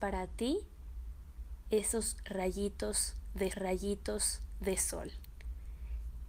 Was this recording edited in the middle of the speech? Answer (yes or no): yes